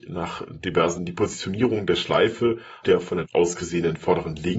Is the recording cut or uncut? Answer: cut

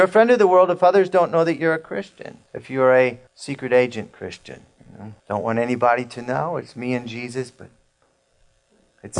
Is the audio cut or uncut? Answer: cut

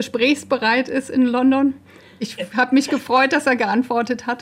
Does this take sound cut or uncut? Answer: uncut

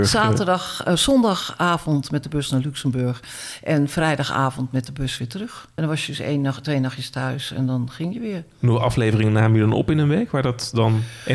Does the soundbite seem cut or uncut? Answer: uncut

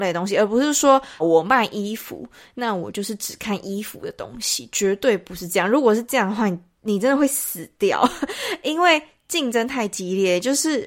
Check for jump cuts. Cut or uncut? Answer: cut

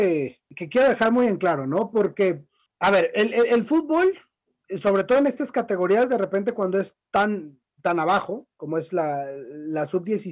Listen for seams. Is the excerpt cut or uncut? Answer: uncut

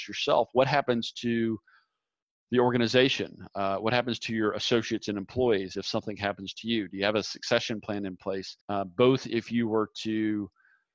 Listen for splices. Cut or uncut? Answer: cut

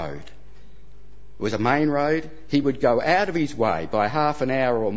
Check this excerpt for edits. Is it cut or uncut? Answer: uncut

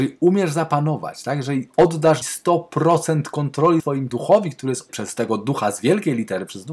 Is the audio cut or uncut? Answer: cut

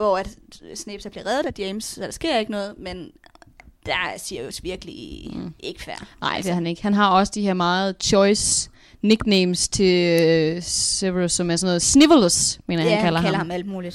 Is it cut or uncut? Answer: uncut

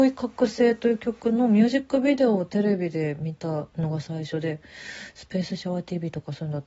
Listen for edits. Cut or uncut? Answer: uncut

